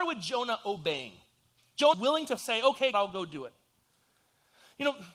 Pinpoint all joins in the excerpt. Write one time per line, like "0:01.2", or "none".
0:01.9
0:02.4
0:02.9